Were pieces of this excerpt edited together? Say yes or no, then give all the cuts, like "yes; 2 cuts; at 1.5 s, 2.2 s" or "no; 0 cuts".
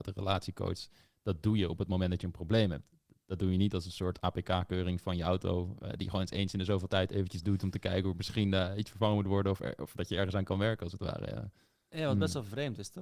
no; 0 cuts